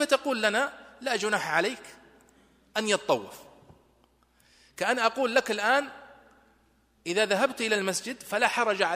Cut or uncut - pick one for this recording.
uncut